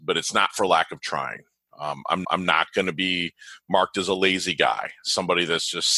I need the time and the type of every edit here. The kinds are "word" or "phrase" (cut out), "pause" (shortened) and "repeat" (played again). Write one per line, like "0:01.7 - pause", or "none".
0:02.2 - repeat

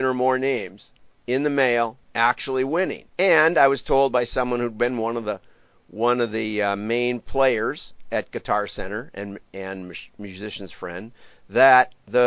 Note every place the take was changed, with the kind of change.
0:02.0 - pause
0:03.1 - pause

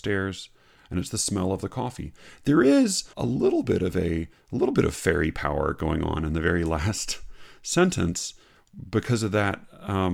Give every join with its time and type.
0:03.1 - pause

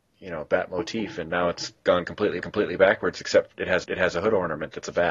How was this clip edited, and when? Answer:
0:01.8 - pause
0:02.4 - repeat
0:03.8 - repeat

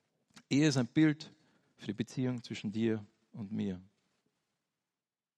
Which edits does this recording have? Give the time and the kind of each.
none

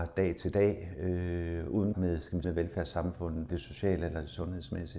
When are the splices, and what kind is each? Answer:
0:01.9 - word
0:02.4 - word
0:03.5 - word

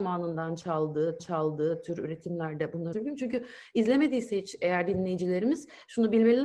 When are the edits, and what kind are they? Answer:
0:01.2 - repeat
0:02.9 - word

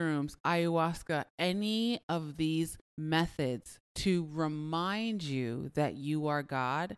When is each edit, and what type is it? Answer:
0:02.9 - pause

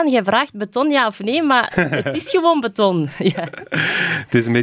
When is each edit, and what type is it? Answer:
none

